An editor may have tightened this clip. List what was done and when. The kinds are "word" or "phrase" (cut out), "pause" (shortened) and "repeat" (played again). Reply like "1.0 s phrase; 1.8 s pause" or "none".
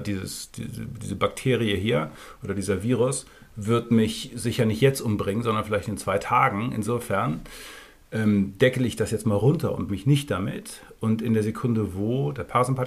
9.9 s word